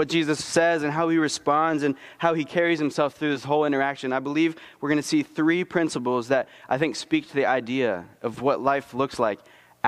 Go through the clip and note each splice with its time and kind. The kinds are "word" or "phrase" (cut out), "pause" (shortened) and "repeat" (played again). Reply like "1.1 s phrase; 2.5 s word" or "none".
none